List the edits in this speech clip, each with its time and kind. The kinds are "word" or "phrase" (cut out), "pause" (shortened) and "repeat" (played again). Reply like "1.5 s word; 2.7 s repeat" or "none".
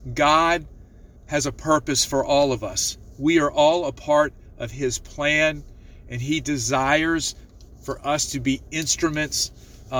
1.2 s pause